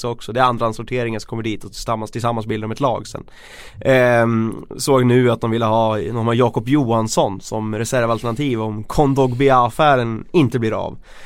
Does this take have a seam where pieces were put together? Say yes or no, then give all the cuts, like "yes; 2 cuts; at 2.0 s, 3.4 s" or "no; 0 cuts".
no; 0 cuts